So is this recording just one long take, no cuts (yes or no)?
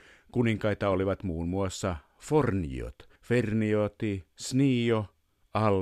no